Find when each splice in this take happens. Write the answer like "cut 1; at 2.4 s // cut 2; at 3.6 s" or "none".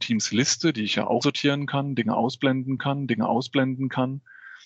cut 1; at 1.2 s // cut 2; at 2.8 s